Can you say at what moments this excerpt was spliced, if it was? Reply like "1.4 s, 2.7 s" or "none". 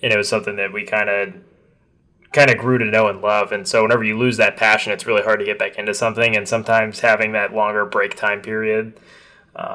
none